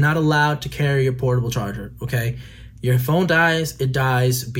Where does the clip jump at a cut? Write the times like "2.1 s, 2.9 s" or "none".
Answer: none